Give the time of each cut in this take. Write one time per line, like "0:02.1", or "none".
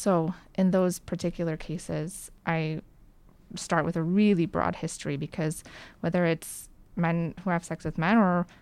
none